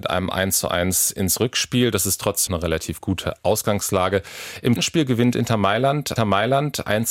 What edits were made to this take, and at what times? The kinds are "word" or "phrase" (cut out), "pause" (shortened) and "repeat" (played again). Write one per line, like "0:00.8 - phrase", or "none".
0:02.5 - word
0:04.8 - word
0:06.2 - repeat